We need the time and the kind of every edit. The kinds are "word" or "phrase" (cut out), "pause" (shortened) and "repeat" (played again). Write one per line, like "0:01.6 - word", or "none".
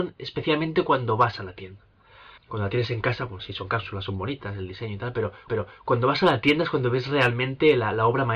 0:02.4 - pause
0:03.4 - word
0:05.5 - repeat